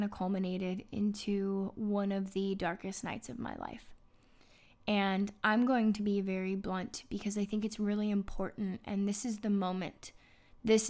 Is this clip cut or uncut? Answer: uncut